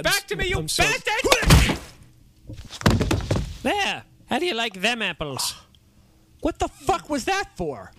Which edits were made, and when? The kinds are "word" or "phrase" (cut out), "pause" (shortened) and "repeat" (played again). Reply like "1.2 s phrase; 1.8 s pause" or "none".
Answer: none